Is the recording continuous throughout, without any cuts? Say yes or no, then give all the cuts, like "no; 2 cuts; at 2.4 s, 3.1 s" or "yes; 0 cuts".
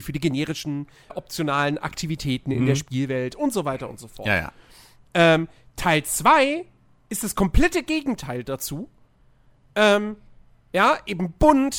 no; 1 cut; at 1.1 s